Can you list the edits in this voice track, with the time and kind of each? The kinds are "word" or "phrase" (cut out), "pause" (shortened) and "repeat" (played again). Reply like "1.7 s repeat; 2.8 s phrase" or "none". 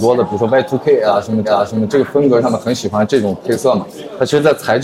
1.4 s repeat